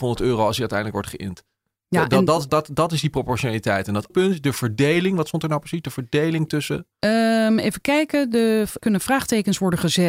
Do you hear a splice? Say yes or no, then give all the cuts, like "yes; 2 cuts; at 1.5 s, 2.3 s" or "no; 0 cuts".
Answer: yes; 3 cuts; at 2.5 s, 4.1 s, 8.8 s